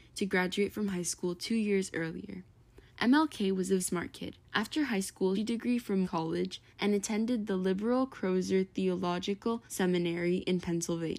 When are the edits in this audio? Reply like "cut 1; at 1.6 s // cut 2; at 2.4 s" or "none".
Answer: cut 1; at 2.9 s // cut 2; at 3.8 s // cut 3; at 4.4 s // cut 4; at 5.3 s // cut 5; at 6.0 s // cut 6; at 6.7 s // cut 7; at 9.7 s